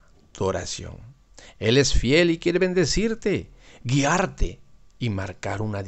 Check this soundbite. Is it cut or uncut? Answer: uncut